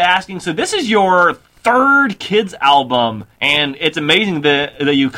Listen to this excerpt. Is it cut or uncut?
cut